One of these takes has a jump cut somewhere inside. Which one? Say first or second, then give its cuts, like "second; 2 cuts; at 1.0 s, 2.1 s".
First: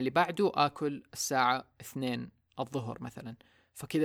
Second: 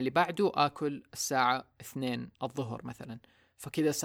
second; 1 cut; at 2.3 s